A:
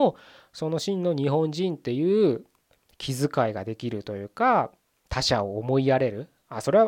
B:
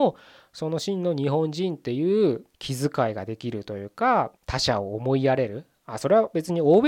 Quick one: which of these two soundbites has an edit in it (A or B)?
B